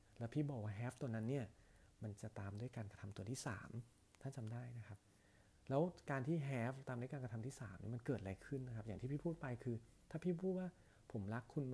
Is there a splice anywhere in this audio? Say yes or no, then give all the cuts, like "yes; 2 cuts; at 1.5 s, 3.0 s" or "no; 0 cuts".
no; 0 cuts